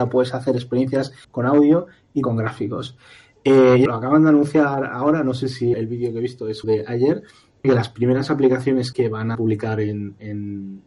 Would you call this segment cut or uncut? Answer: cut